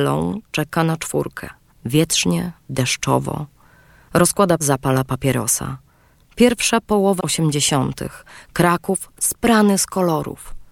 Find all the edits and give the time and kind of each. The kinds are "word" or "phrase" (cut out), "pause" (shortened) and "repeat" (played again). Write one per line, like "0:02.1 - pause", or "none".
0:01.7 - pause
0:04.6 - word
0:07.2 - word